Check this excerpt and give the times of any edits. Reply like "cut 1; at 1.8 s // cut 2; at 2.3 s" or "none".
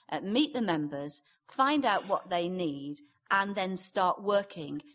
none